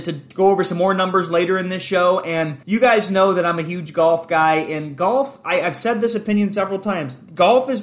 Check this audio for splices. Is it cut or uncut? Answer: cut